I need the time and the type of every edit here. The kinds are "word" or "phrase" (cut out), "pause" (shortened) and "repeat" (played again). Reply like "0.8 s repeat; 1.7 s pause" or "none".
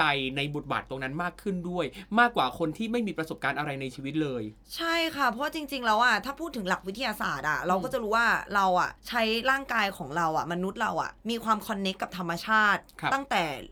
9.0 s pause; 11.2 s pause

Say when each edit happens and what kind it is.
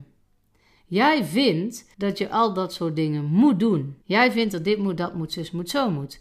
1.9 s pause; 4.0 s pause

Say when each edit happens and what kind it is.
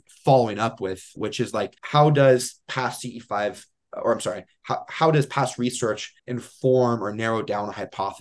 1.2 s word; 1.8 s pause; 6.2 s pause

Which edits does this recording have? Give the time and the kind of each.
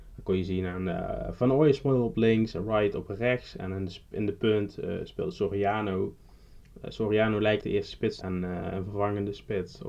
7.6 s word; 8.2 s word

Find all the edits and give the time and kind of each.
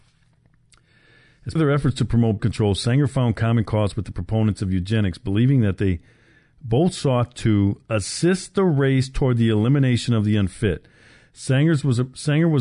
1.6 s word; 2.4 s word

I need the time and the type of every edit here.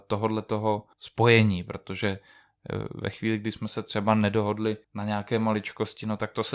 0.9 s pause; 4.8 s pause

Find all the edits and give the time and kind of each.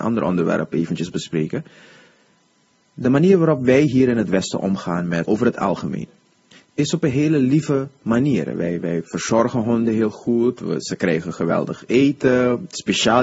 5.2 s word

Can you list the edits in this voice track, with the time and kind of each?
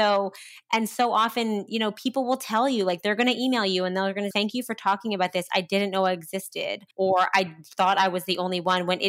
4.3 s word; 6.9 s pause

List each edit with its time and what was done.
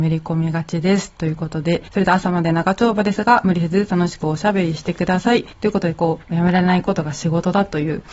1.9 s pause; 5.5 s pause; 6.2 s pause

